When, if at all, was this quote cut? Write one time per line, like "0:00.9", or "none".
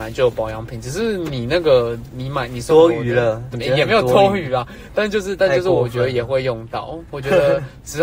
0:03.5